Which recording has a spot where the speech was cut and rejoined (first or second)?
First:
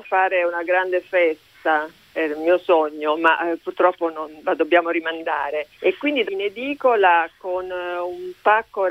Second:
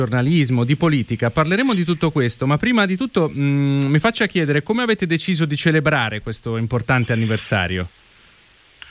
first